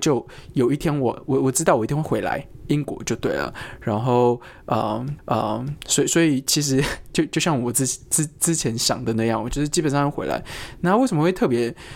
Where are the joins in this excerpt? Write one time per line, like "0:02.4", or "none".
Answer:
0:05.2